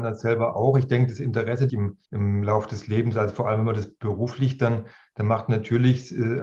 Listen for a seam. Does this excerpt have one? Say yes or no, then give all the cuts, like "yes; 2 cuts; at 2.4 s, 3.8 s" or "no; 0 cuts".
yes; 2 cuts; at 1.7 s, 2.1 s